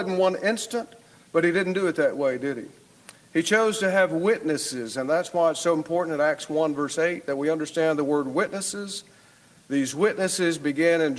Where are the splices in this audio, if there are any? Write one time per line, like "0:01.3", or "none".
none